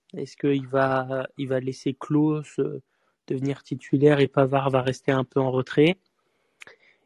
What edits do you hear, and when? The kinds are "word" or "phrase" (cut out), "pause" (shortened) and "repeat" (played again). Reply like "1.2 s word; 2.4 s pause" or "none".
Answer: none